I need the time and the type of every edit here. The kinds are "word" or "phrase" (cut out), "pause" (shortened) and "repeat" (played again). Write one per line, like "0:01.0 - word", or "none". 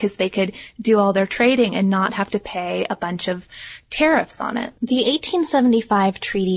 0:04.8 - pause

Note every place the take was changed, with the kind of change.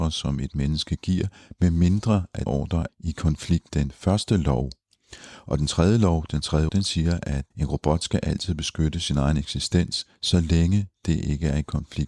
0:02.5 - word
0:02.9 - word
0:03.7 - word
0:06.7 - word
0:07.5 - pause
0:10.1 - pause

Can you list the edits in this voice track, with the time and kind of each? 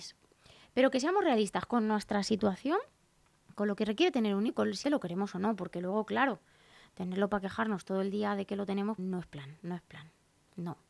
0:04.5 - word
0:04.8 - word
0:09.0 - word

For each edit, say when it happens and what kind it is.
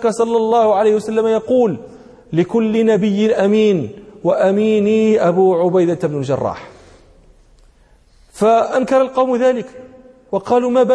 none

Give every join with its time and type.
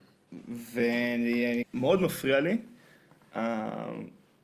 0:01.6 - phrase

